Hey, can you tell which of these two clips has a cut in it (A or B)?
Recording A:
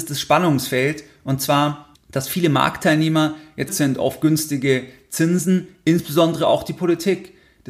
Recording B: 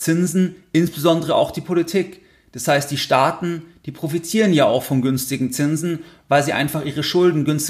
A